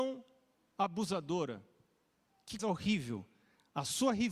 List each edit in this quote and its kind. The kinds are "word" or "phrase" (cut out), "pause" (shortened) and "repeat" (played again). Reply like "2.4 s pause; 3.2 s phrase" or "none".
2.6 s word